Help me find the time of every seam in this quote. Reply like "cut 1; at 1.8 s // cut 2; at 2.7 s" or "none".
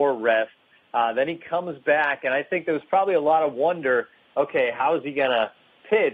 none